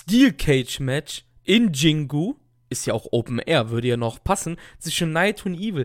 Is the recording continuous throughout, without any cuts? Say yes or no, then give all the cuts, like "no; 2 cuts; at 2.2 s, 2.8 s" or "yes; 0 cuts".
yes; 0 cuts